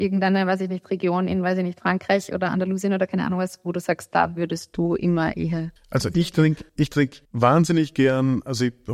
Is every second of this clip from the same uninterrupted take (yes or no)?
no